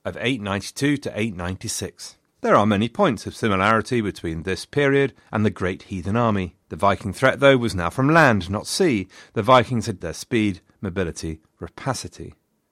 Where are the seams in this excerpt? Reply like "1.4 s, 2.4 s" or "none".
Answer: 2.3 s, 6.6 s, 10.0 s